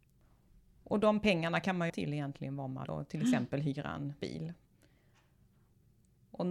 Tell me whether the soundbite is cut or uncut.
cut